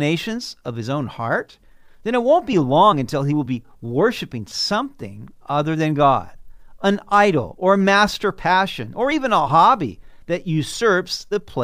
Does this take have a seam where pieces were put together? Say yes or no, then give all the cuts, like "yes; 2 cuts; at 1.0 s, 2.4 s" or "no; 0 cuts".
no; 0 cuts